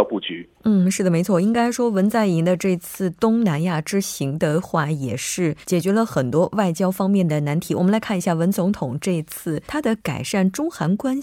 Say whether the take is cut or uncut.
cut